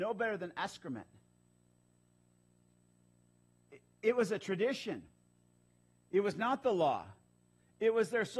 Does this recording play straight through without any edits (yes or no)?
yes